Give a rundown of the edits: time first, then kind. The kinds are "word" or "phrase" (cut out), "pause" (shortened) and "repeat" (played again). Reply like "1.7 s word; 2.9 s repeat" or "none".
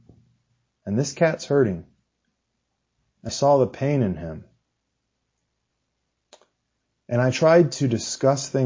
3.3 s word

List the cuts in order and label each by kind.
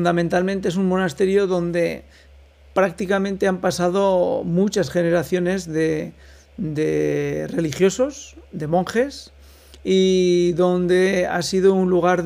none

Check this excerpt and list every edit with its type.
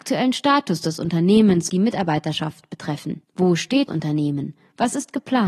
1.7 s word; 3.2 s pause; 3.9 s word

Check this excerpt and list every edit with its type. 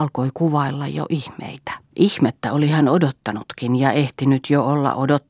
1.8 s pause

